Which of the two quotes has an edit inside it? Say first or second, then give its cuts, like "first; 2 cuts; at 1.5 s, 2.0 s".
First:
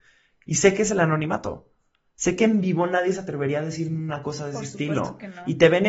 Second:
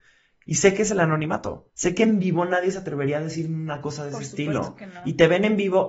second; 1 cut; at 1.7 s